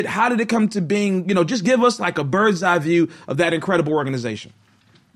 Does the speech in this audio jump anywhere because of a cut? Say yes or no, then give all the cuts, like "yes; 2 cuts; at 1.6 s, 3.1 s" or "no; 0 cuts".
no; 0 cuts